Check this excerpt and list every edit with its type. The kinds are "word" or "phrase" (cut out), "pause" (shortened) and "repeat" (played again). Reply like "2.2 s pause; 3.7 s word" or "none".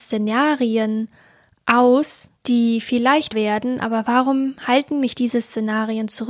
2.4 s pause; 3.3 s word